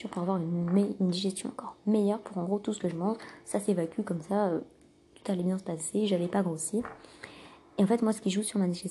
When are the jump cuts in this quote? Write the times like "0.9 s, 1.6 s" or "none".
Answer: none